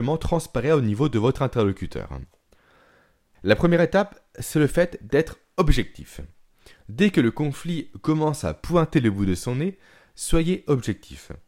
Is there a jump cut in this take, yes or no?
no